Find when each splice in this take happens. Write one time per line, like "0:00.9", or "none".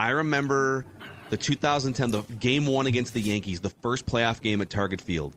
none